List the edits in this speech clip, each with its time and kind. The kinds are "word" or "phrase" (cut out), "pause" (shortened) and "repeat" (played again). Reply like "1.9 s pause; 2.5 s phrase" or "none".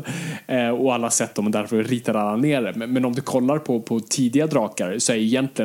none